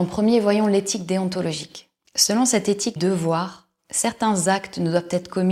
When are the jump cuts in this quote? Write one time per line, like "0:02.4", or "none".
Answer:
0:02.0
0:03.0